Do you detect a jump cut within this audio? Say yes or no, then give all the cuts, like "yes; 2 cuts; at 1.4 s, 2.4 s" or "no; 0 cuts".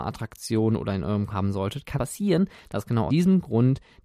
yes; 3 cuts; at 1.3 s, 1.9 s, 3.1 s